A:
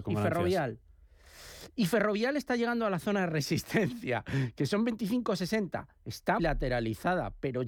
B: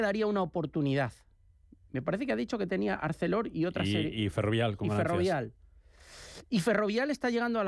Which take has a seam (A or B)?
A